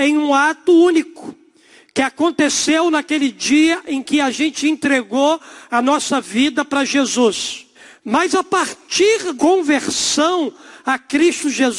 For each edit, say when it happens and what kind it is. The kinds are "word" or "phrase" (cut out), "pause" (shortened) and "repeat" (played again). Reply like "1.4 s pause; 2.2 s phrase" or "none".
7.7 s pause; 9.4 s word